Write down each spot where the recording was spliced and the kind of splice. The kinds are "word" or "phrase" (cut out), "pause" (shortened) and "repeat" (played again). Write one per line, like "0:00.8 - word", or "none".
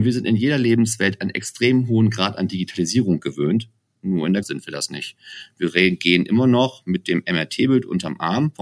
0:04.4 - word